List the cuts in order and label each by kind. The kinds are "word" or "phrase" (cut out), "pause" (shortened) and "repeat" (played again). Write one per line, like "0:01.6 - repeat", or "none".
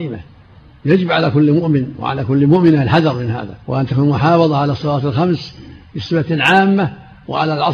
0:03.6 - pause